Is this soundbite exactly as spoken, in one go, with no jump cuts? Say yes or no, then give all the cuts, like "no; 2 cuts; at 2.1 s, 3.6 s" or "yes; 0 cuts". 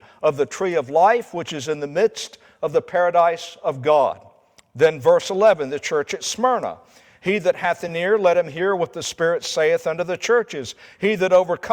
yes; 0 cuts